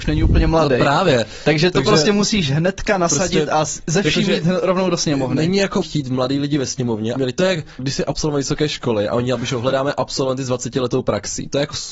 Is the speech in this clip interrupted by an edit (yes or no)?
yes